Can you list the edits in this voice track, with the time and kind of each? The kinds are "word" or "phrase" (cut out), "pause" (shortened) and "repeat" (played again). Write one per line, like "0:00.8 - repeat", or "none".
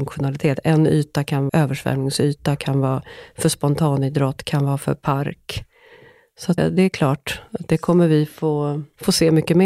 0:01.5 - word
0:06.6 - word